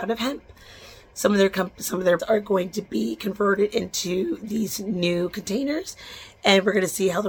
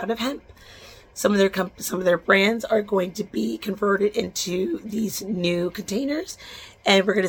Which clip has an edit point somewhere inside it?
first; 1 cut; at 2.2 s

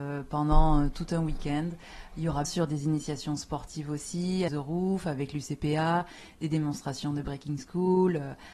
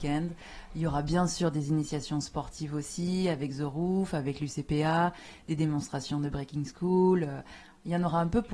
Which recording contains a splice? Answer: first; 2 cuts; at 2.4 s, 4.5 s

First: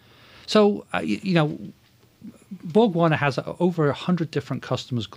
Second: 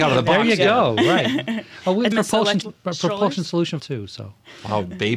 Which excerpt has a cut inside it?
second; 3 cuts; at 2.1 s, 2.6 s, 3.8 s

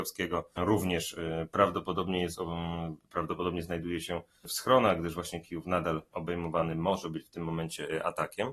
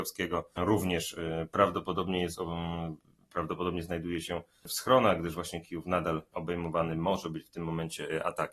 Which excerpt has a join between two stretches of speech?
first; 1 cut; at 3.0 s

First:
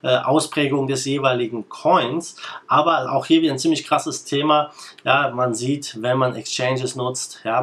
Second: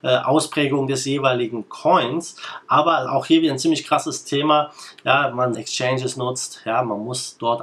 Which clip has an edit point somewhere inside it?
second; 1 cut; at 5.5 s

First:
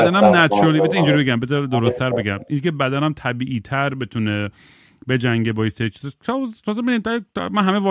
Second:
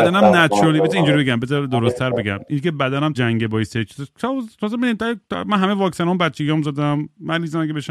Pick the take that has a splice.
second; 1 cut; at 3.1 s

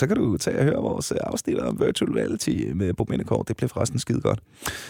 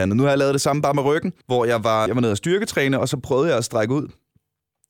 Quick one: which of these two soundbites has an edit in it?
second; 2 cuts; at 1.4 s, 2.1 s

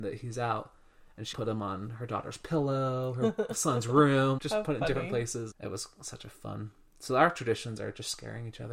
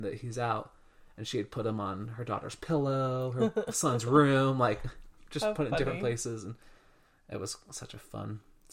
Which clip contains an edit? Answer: first; 3 cuts; at 1.3 s, 4.4 s, 5.5 s

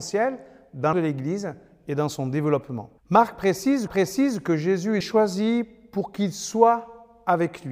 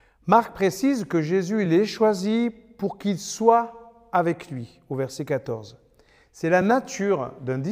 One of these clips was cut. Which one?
first; 4 cuts; at 0.9 s, 3.0 s, 3.9 s, 5.0 s

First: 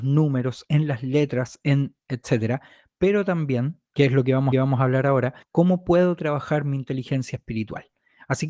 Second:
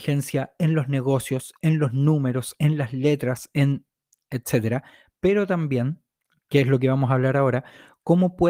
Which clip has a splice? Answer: first; 4 cuts; at 2.0 s, 3.9 s, 4.5 s, 5.4 s

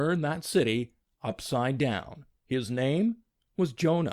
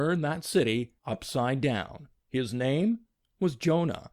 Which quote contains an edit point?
second; 1 cut; at 1.0 s

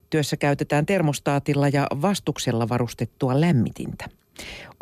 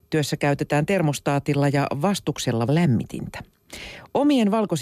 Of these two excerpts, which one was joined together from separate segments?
second; 1 cut; at 2.7 s

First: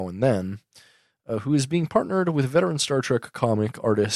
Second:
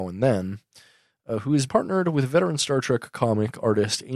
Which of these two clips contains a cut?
second; 1 cut; at 1.7 s

